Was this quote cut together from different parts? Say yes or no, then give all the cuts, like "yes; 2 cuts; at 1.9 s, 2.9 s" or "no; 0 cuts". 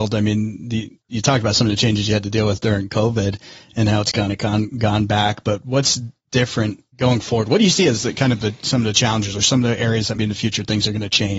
yes; 3 cuts; at 1.0 s, 6.9 s, 10.2 s